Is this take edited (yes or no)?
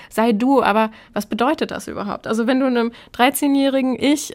no